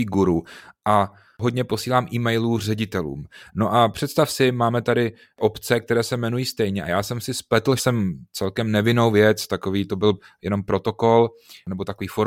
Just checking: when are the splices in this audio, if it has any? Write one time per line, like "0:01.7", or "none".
0:07.8